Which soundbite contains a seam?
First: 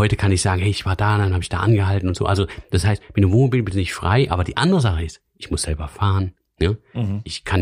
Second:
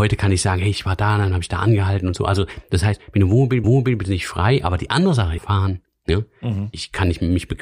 second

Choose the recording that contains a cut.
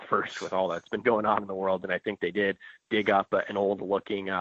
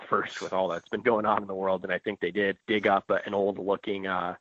second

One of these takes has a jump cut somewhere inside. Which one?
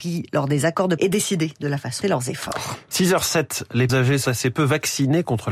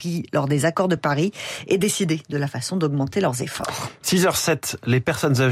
first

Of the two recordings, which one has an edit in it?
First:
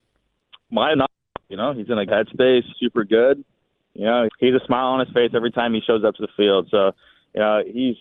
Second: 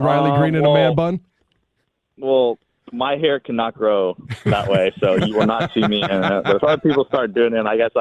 first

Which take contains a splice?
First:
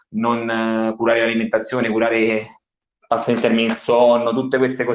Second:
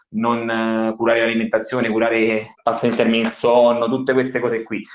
second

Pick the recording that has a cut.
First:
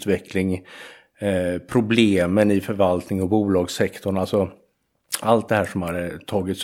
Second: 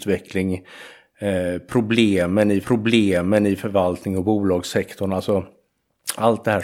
second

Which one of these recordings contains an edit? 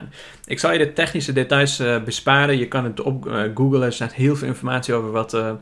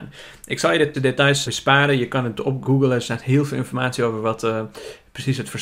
second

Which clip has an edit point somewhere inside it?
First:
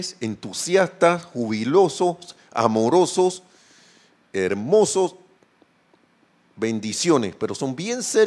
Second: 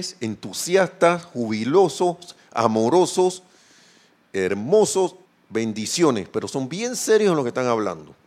second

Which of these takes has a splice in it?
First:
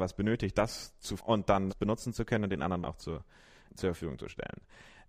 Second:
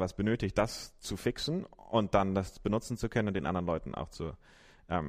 first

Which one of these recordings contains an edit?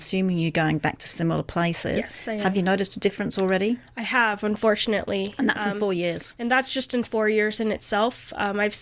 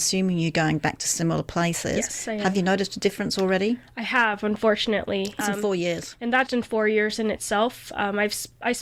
second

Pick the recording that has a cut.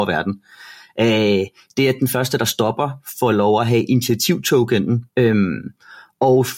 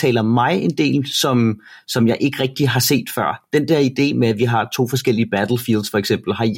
first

